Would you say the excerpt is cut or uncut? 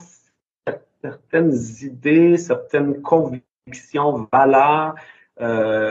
uncut